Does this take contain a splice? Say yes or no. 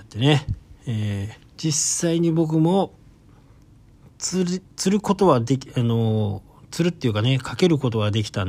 yes